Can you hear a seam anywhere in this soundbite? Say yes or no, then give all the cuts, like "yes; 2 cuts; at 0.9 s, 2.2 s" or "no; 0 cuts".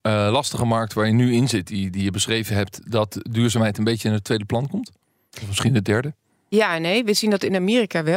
no; 0 cuts